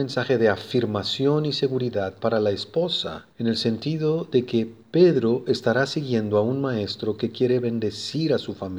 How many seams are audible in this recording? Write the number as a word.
one